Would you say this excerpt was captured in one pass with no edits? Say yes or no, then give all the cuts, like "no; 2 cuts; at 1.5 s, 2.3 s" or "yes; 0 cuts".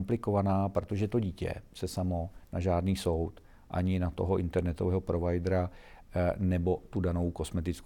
yes; 0 cuts